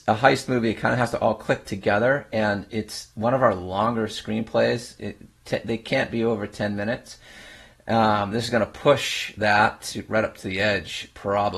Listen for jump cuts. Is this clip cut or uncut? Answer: uncut